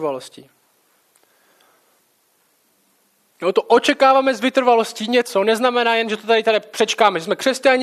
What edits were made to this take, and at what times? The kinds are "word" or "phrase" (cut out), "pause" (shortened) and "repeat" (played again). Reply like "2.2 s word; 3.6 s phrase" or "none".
none